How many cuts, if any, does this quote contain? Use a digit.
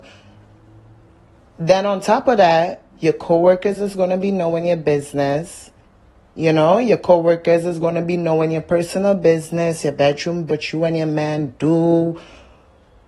3